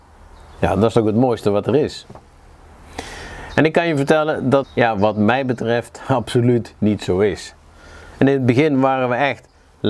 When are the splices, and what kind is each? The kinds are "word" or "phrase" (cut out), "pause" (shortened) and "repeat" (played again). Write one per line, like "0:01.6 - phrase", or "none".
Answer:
0:04.6 - word

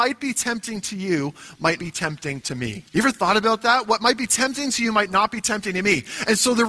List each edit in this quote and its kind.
0:01.8 - word
0:02.9 - pause

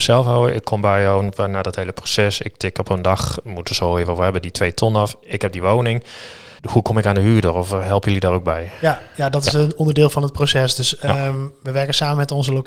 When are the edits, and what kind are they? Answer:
0:06.6 - pause

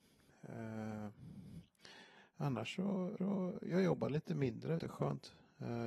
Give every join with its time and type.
0:03.2 - repeat
0:04.8 - word

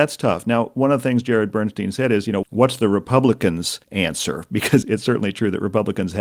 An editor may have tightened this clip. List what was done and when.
0:02.4 - word
0:03.8 - pause
0:04.8 - word

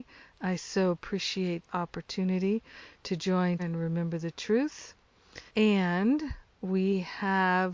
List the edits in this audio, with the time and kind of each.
0:01.7 - word
0:03.6 - word
0:05.5 - pause

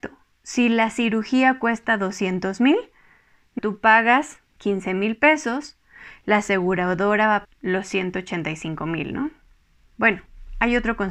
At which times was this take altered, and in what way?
0:03.6 - word
0:07.4 - word

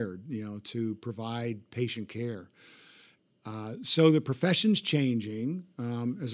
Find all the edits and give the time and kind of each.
none

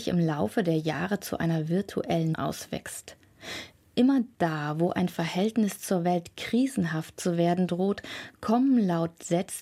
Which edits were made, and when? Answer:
0:02.3 - word

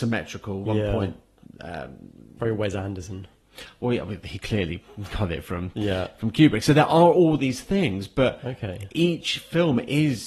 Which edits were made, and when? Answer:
none

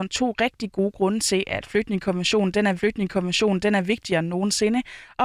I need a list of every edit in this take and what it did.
0:02.8 - repeat

